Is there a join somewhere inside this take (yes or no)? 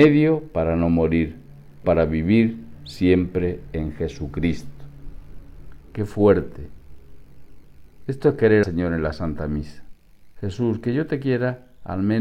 yes